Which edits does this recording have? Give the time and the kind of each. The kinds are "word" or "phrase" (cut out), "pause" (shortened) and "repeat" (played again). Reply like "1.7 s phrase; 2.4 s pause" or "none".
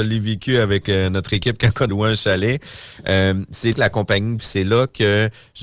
1.9 s word; 3.7 s word; 4.4 s word